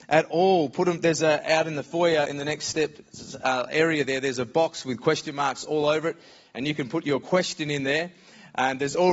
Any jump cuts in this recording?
no; 0 cuts

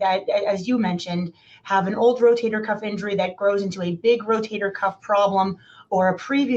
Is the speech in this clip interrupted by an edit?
no; 0 cuts

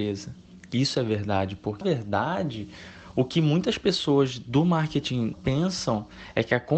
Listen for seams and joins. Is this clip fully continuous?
no; 2 cuts; at 1.8 s, 5.3 s

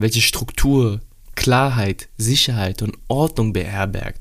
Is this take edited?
no; 0 cuts

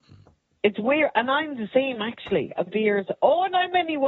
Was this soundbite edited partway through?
yes; 1 cut; at 2.7 s

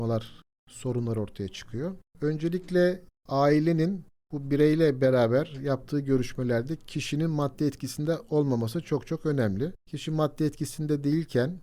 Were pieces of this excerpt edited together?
yes; 1 cut; at 2.1 s

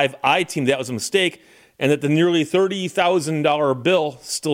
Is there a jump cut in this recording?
no; 0 cuts

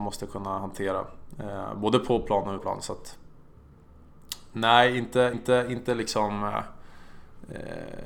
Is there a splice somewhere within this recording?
yes; 2 cuts; at 2.6 s, 5.3 s

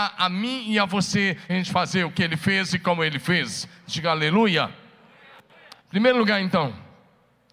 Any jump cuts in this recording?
yes; 2 cuts; at 1.5 s, 5.8 s

